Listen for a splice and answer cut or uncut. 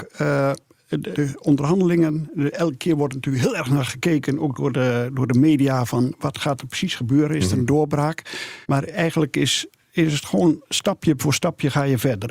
cut